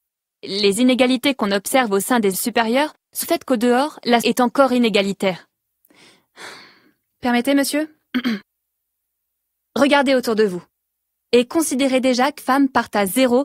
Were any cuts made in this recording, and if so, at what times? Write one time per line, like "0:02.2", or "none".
0:02.3
0:03.2
0:04.2
0:12.4

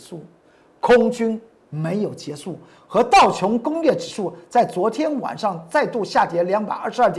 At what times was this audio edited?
none

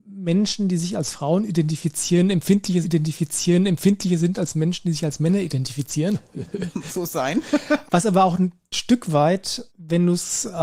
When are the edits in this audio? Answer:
0:02.8
0:06.9
0:07.9
0:09.7

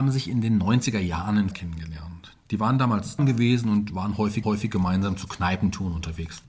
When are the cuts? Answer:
0:01.5
0:03.2
0:04.4

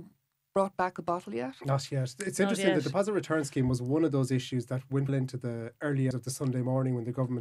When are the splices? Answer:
0:05.1
0:06.1

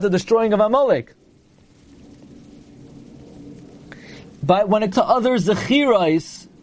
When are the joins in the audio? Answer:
0:04.9

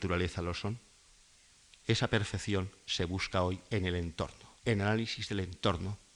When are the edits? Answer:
0:04.6

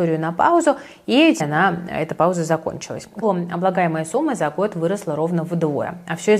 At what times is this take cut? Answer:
0:01.4
0:03.2

